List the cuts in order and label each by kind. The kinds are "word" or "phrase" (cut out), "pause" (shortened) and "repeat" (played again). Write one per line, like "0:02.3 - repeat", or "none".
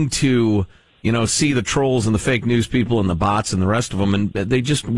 none